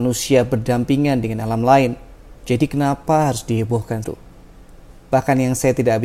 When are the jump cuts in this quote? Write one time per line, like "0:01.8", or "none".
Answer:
0:02.4
0:04.0